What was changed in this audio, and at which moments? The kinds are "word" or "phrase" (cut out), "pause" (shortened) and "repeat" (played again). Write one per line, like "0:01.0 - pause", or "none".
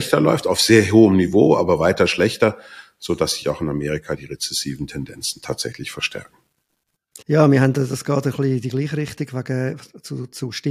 0:07.2 - pause